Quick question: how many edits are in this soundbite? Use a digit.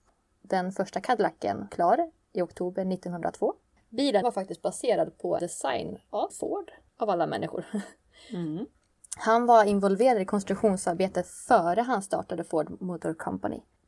4